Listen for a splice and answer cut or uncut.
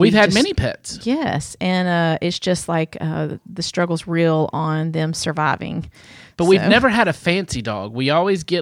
uncut